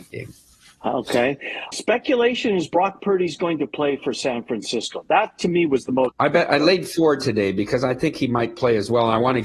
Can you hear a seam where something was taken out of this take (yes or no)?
yes